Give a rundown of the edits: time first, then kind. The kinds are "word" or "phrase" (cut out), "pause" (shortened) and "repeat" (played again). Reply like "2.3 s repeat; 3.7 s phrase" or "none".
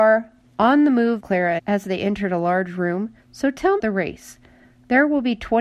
1.2 s word; 1.6 s word; 3.2 s pause; 3.8 s phrase